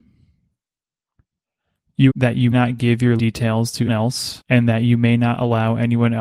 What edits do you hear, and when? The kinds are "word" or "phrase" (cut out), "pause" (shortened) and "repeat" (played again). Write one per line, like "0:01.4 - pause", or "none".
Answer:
0:02.1 - word
0:02.5 - word
0:03.2 - word
0:03.9 - word